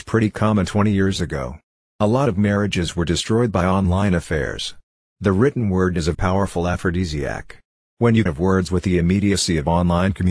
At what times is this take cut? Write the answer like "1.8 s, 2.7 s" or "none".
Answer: 6.1 s, 8.3 s